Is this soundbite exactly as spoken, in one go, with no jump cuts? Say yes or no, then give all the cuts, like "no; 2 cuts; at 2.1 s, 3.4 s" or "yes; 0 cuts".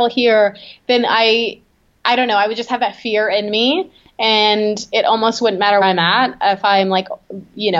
no; 1 cut; at 5.8 s